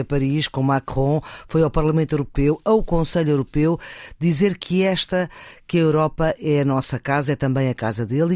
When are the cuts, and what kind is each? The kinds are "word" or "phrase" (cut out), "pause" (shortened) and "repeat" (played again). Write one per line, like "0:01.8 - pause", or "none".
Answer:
none